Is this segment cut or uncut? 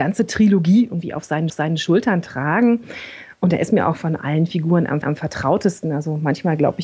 cut